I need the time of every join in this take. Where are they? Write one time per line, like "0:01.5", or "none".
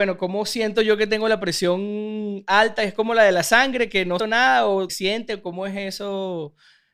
0:04.2
0:04.9